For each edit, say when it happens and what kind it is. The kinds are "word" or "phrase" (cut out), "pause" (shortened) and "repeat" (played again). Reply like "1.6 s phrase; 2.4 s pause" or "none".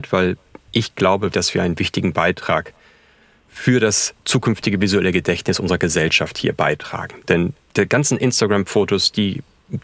1.3 s word